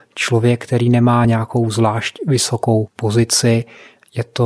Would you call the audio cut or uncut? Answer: uncut